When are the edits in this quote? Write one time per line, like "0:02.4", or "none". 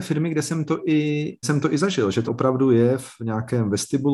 0:01.4
0:02.3